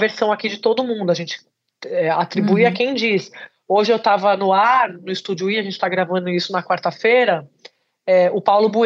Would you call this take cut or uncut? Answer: uncut